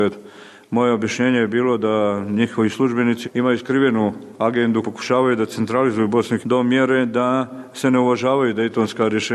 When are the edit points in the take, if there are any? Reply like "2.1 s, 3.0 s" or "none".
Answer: 3.2 s, 4.8 s, 6.4 s

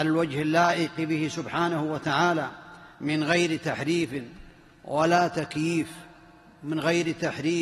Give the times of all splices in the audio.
2.9 s

